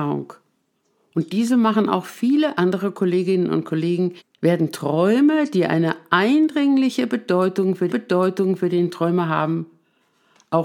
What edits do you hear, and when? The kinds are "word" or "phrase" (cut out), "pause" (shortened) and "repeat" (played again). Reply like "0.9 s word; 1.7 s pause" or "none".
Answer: 4.2 s pause; 7.9 s repeat